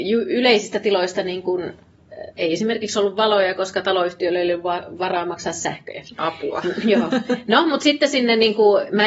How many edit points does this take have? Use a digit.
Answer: 1